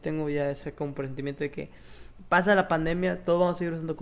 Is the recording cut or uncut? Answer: uncut